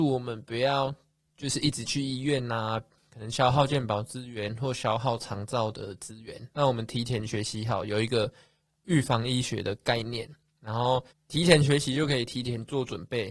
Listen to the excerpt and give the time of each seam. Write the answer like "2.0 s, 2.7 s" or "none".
11.1 s